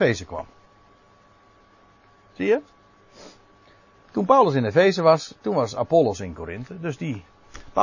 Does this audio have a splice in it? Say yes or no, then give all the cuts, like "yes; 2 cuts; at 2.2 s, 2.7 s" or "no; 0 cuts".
no; 0 cuts